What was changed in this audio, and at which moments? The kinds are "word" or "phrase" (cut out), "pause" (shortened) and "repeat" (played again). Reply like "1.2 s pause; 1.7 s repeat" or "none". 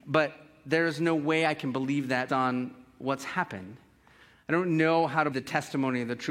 2.3 s word; 5.3 s word